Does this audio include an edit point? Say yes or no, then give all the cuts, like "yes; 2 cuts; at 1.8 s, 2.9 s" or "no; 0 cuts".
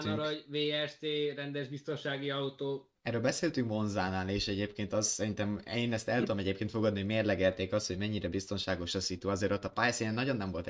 no; 0 cuts